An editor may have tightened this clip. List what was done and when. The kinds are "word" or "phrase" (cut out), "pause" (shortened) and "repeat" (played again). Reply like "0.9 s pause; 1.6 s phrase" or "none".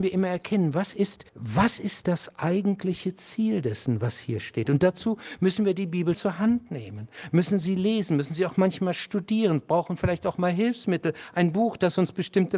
1.3 s pause; 6.1 s word